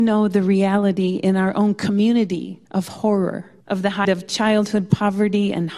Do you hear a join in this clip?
yes; 3 cuts; at 2.6 s, 3.6 s, 4.0 s

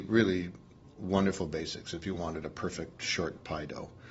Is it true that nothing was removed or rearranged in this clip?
yes; 0 cuts

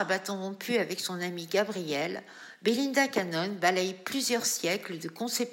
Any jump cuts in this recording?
no; 0 cuts

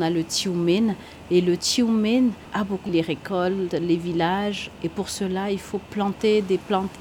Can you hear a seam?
yes; 1 cut; at 2.9 s

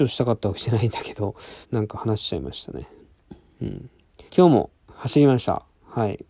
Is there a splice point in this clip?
yes; 3 cuts; at 1.6 s, 4.3 s, 4.7 s

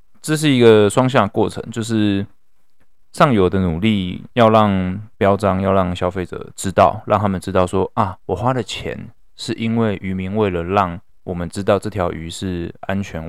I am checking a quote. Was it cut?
yes; 3 cuts; at 4.3 s, 5.1 s, 11.1 s

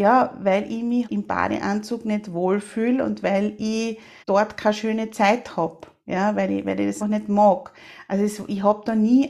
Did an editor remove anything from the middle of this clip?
yes; 3 cuts; at 1.0 s, 4.2 s, 7.0 s

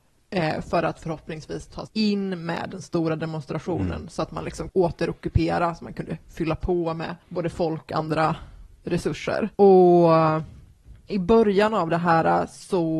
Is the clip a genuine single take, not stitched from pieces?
no; 6 cuts; at 1.9 s, 4.7 s, 7.2 s, 7.9 s, 9.5 s, 11.1 s

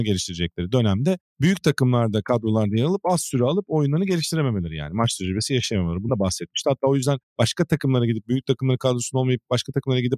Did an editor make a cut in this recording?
yes; 1 cut; at 6.1 s

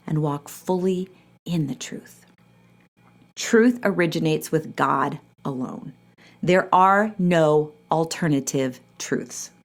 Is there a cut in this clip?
no; 0 cuts

